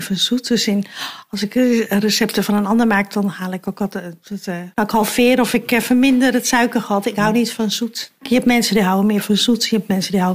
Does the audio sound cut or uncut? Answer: cut